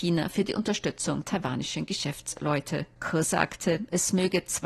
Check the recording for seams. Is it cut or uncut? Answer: cut